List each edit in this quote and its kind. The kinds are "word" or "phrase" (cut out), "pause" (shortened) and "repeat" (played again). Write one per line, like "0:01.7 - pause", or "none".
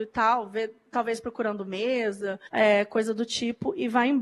0:02.5 - pause